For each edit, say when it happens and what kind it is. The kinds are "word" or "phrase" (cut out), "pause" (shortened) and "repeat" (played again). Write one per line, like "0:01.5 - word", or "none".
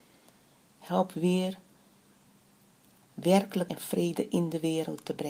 0:03.7 - word

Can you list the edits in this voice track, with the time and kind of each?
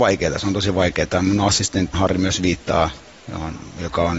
0:01.9 - word

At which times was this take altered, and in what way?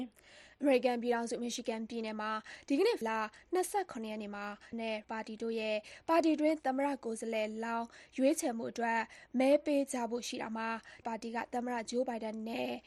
0:03.0 - word
0:04.7 - word
0:05.0 - word
0:11.0 - word

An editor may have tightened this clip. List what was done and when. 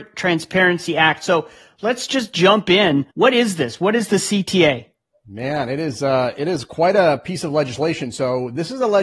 0:03.1 - pause

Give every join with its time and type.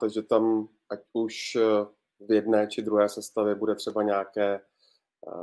none

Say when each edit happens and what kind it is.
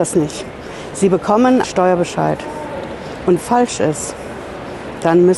0:01.6 - word
0:03.4 - phrase

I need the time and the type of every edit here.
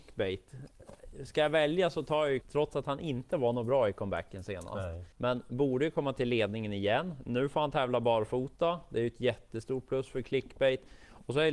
0:02.4 - word
0:05.1 - pause

